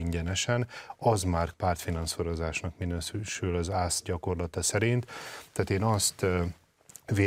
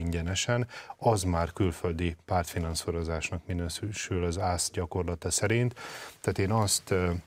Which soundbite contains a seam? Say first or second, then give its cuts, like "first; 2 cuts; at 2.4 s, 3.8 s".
first; 1 cut; at 1.5 s